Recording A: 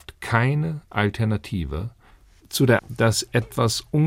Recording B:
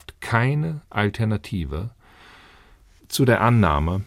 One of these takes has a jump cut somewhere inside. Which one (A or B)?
A